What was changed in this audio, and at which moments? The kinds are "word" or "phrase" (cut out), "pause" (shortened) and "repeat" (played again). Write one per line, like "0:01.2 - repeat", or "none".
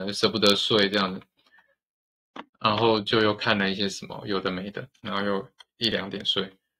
0:02.5 - pause
0:04.9 - pause